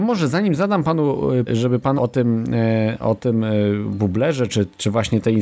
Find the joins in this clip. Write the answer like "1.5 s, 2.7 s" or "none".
1.5 s, 2.0 s